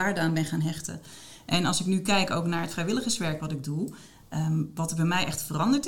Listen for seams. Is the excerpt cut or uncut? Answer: uncut